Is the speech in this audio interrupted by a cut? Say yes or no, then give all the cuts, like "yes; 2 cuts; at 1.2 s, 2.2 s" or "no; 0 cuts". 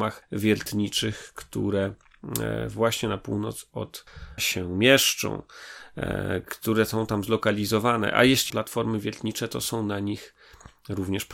yes; 2 cuts; at 4.4 s, 8.5 s